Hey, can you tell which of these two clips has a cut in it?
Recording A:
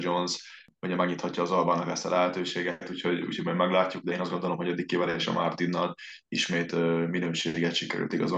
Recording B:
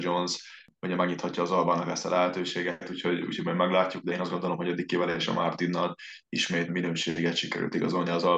B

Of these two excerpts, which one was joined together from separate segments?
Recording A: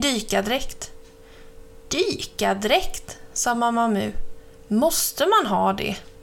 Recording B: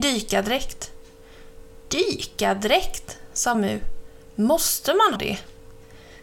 B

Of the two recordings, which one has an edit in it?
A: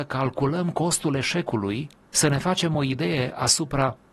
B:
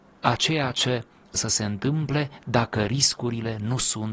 B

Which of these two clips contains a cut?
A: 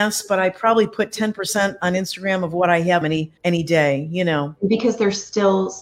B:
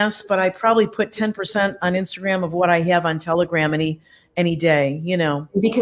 A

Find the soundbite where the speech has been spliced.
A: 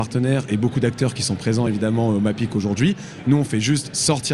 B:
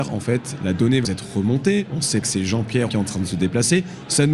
B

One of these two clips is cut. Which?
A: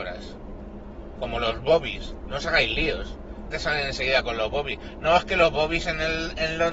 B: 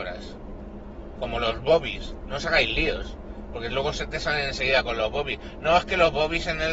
A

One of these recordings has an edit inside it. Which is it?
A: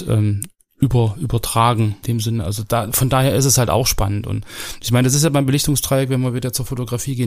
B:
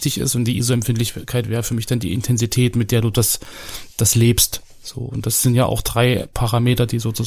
A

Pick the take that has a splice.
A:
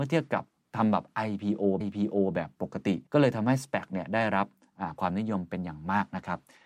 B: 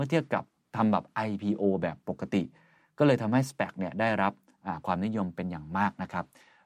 A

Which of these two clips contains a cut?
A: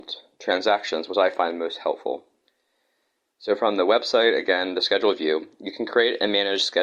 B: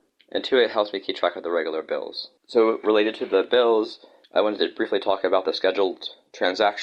B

